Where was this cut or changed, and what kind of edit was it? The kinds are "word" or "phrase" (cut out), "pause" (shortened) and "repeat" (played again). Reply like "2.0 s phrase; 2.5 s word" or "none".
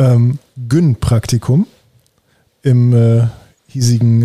none